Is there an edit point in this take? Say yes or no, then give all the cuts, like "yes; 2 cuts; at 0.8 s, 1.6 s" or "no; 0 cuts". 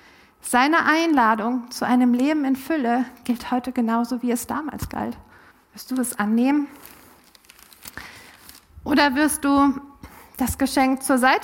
yes; 1 cut; at 5.5 s